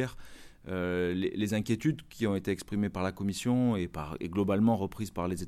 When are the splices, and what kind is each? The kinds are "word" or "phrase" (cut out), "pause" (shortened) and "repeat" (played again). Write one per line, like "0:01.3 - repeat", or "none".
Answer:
none